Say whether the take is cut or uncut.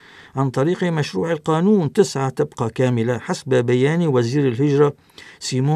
uncut